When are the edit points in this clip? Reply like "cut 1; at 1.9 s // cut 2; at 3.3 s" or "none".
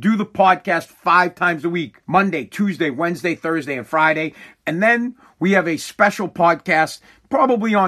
cut 1; at 2.0 s

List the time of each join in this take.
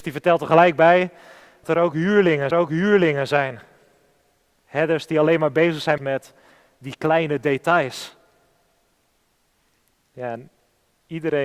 cut 1; at 1.6 s // cut 2; at 2.5 s // cut 3; at 6.0 s

